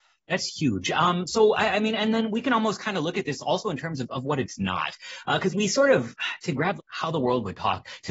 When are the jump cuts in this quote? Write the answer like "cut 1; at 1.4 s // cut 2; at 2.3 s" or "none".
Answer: cut 1; at 5.5 s // cut 2; at 6.8 s